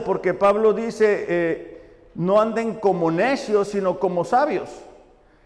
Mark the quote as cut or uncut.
uncut